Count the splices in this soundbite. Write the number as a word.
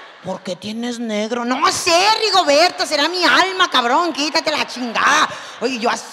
zero